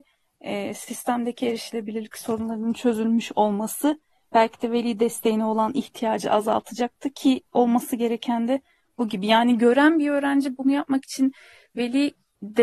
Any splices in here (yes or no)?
no